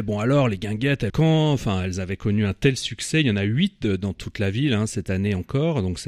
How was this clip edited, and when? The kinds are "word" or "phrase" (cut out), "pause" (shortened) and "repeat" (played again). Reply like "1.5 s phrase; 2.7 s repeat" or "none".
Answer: 1.1 s word